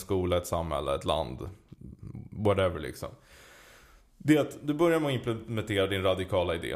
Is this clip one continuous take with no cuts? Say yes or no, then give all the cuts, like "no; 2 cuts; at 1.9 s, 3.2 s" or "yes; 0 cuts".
yes; 0 cuts